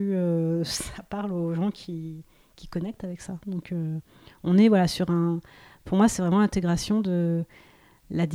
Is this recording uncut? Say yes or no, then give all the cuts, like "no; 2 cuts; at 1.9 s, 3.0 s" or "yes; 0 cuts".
yes; 0 cuts